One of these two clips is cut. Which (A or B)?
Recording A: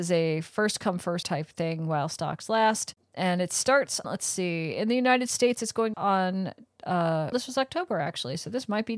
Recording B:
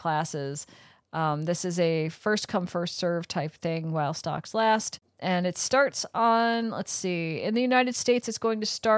A